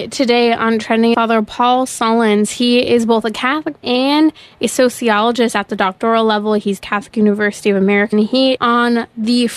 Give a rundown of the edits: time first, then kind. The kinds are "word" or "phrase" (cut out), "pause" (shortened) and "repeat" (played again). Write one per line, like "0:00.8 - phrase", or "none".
0:01.1 - word
0:03.8 - word
0:06.8 - phrase
0:08.1 - phrase
0:08.6 - word